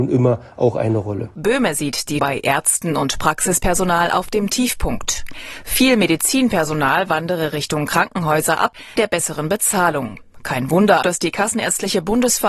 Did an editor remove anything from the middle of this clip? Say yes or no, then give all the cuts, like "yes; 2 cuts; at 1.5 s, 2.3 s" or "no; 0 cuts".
yes; 3 cuts; at 2.2 s, 9.0 s, 11.0 s